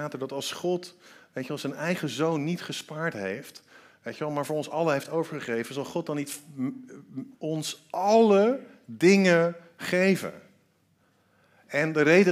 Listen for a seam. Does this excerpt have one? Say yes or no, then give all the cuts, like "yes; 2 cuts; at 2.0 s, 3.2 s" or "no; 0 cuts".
yes; 1 cut; at 7.3 s